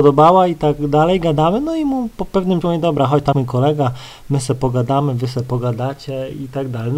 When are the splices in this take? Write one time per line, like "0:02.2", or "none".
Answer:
0:02.6
0:03.3